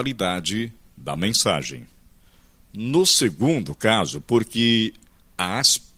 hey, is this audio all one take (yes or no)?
yes